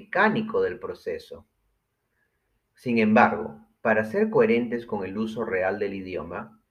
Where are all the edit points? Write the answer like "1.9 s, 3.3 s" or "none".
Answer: none